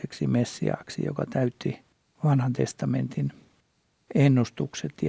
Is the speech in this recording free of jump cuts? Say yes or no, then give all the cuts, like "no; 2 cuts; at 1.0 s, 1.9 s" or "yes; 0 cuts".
yes; 0 cuts